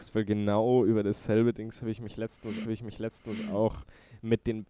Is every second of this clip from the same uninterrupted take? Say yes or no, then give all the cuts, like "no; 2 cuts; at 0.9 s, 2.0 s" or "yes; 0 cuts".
no; 1 cut; at 2.6 s